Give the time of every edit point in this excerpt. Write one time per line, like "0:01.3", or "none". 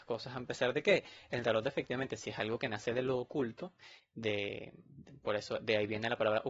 none